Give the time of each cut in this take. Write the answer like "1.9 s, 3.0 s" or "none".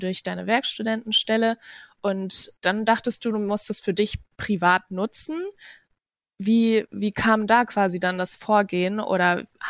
none